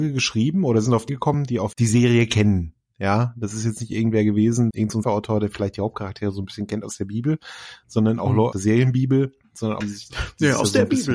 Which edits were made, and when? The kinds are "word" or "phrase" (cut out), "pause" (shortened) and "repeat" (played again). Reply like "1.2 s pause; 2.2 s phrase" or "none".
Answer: 1.1 s word; 1.7 s word; 4.7 s word; 5.0 s word; 8.5 s word; 9.8 s word